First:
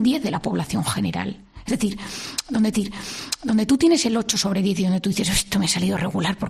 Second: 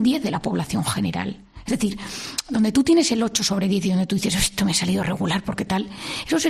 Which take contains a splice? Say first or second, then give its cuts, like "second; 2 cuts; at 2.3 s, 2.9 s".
first; 1 cut; at 2.7 s